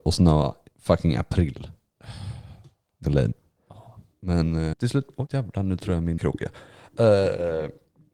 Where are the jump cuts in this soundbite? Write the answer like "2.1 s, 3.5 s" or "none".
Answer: 3.0 s, 4.7 s, 5.3 s, 6.2 s